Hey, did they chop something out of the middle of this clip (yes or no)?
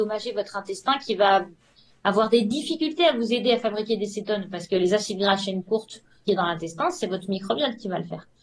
yes